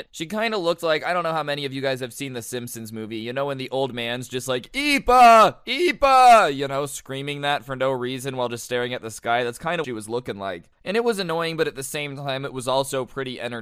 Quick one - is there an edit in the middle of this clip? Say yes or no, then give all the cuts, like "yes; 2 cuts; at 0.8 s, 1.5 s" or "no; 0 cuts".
yes; 1 cut; at 9.8 s